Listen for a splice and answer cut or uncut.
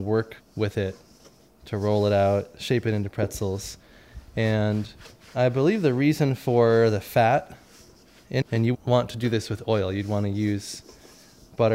cut